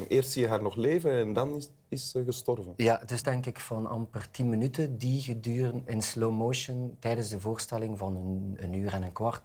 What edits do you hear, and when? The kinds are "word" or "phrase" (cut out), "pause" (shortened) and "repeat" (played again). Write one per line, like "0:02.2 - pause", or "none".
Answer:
0:03.2 - phrase

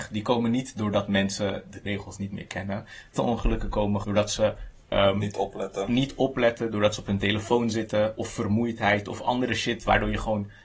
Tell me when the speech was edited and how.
0:01.8 - word
0:03.1 - word
0:04.0 - word

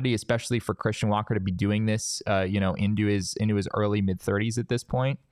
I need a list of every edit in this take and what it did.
none

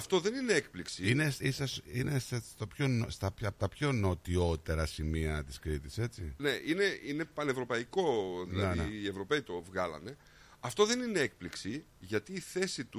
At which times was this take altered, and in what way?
none

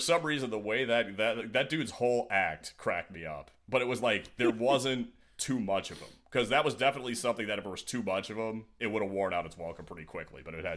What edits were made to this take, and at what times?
none

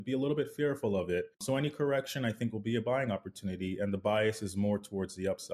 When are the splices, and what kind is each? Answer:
0:01.3 - pause

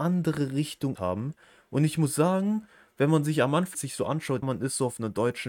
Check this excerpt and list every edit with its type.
0:01.0 - word
0:03.7 - word
0:04.4 - word

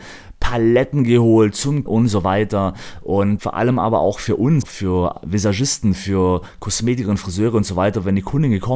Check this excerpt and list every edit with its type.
0:01.9 - word
0:03.4 - word
0:04.6 - word

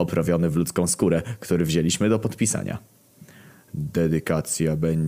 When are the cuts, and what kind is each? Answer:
none

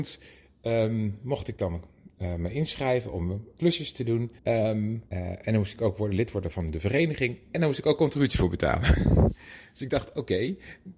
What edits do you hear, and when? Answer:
0:04.4 - pause
0:05.1 - pause

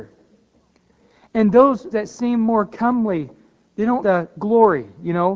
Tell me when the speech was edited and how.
0:01.9 - word
0:04.0 - word

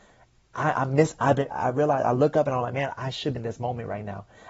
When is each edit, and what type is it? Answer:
0:01.5 - word
0:03.4 - word

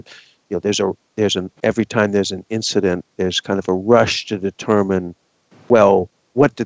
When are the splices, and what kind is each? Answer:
0:01.6 - pause

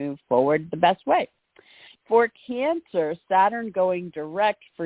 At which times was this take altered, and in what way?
none

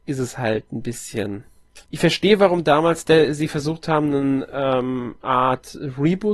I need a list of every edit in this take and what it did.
0:01.8 - pause

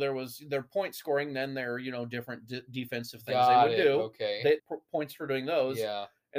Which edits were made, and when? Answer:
0:04.6 - phrase

